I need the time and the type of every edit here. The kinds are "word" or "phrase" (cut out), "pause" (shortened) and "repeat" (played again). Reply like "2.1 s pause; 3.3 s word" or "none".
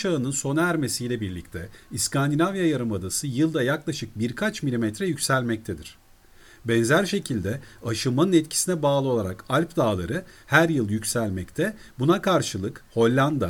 none